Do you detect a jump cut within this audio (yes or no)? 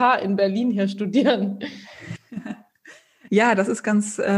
yes